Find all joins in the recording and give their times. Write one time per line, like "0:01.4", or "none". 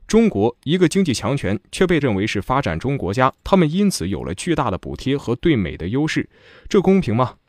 0:02.0